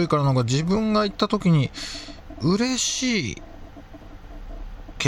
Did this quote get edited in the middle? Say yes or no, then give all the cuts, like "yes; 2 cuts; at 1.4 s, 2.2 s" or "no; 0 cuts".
no; 0 cuts